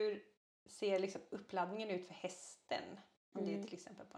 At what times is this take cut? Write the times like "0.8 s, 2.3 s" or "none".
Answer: none